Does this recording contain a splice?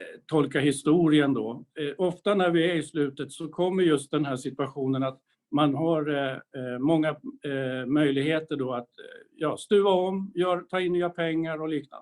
yes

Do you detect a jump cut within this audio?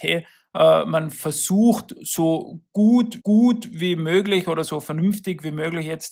yes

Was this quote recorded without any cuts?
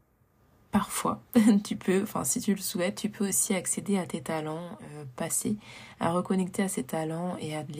yes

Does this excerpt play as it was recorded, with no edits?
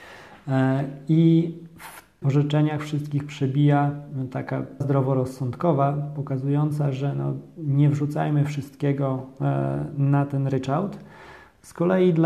no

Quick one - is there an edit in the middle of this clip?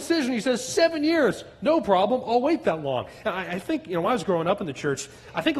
no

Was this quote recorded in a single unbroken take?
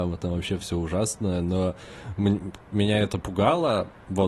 yes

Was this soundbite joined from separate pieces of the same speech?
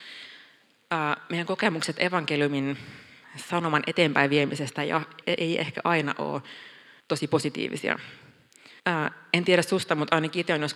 yes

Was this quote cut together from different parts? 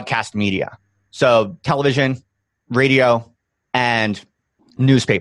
no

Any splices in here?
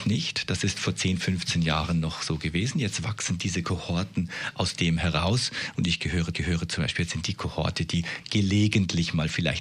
yes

